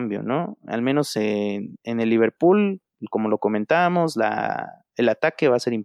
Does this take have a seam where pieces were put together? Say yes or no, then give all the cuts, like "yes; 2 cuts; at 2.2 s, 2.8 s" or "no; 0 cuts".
no; 0 cuts